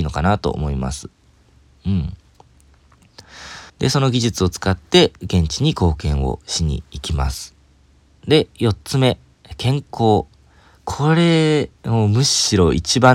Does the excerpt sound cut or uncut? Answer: cut